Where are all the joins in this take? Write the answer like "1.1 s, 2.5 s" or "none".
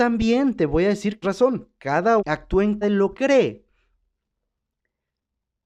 1.2 s, 2.2 s, 2.8 s, 3.1 s